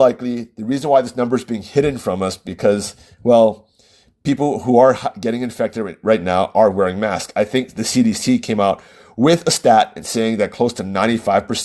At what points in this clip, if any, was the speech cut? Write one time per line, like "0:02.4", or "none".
none